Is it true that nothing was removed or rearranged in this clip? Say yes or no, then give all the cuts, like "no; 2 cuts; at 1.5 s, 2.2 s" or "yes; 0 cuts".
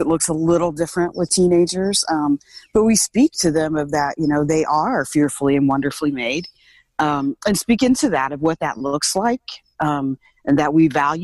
yes; 0 cuts